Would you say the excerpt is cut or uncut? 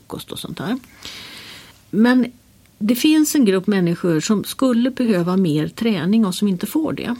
cut